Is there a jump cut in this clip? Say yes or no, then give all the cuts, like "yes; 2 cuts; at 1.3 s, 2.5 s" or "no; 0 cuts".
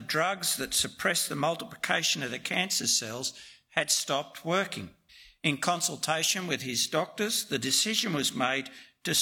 yes; 1 cut; at 5.1 s